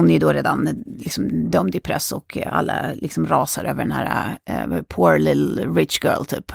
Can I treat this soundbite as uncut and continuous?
yes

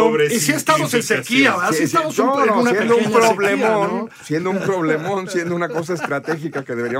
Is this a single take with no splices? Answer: yes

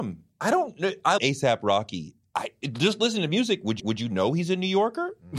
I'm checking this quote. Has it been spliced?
yes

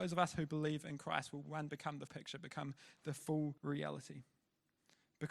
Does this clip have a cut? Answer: yes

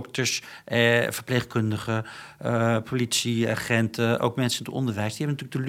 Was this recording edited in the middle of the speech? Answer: no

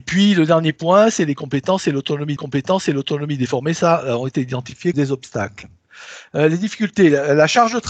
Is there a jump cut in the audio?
yes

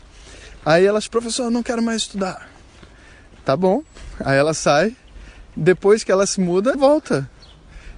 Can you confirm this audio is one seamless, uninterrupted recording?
no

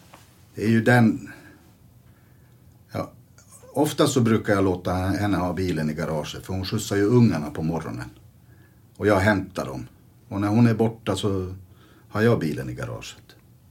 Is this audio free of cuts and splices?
yes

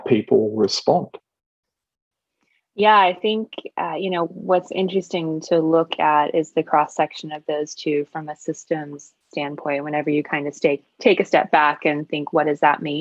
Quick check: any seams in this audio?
no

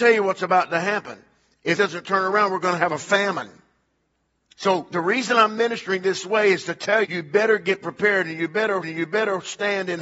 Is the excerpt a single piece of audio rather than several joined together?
no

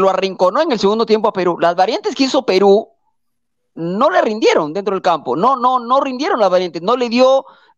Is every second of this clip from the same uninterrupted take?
yes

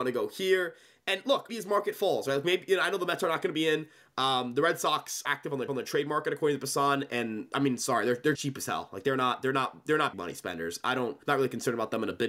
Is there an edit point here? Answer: yes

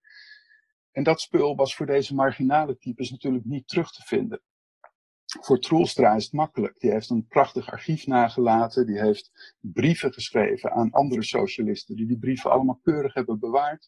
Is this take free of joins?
yes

